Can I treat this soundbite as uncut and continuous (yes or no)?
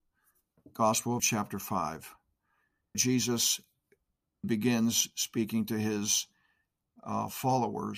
no